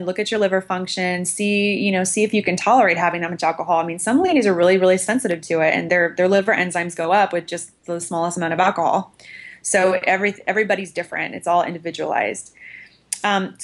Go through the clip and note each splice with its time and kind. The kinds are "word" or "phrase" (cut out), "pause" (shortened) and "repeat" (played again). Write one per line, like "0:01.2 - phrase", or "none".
none

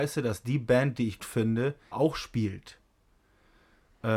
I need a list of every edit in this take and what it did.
0:01.2 - word
0:01.9 - word

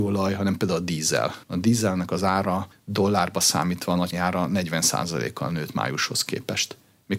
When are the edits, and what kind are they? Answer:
0:01.4 - pause
0:02.7 - pause
0:04.1 - word

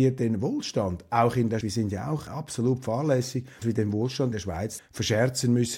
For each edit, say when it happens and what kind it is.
0:01.6 - word
0:02.3 - word
0:03.6 - word
0:04.3 - word
0:04.8 - word

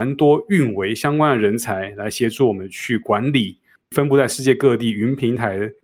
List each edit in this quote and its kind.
none

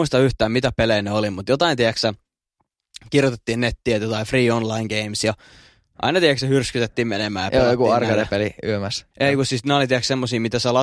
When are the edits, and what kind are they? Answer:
0:09.1 - pause

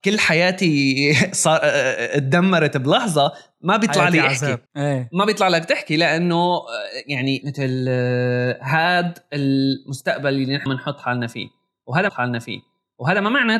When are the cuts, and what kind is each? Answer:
0:04.7 - pause
0:07.4 - word
0:10.7 - word
0:12.1 - repeat

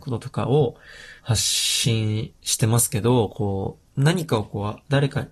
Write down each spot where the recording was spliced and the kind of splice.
0:01.2 - pause
0:03.9 - pause

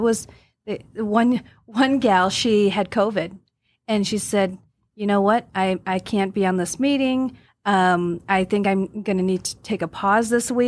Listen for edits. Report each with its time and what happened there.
none

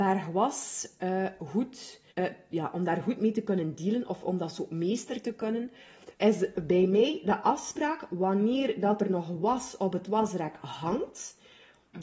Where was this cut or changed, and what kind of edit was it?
0:02.1 - pause
0:06.1 - pause

